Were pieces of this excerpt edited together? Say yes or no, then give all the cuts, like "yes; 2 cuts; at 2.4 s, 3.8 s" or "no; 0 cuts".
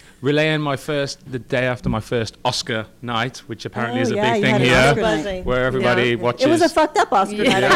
no; 0 cuts